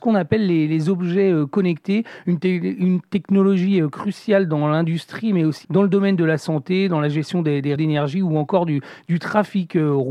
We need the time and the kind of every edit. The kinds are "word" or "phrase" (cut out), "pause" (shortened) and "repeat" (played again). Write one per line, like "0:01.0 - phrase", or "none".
0:05.6 - word
0:07.8 - word